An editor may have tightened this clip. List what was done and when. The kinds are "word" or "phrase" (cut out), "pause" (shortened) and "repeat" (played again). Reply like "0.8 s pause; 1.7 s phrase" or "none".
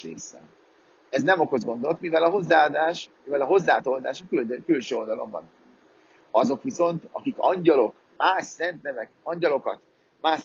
3.1 s pause; 8.0 s pause; 9.2 s pause